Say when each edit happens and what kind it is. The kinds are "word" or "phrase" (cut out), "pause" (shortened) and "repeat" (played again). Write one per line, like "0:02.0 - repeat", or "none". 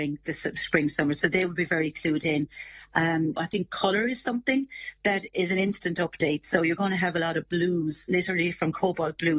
0:03.4 - word
0:05.3 - word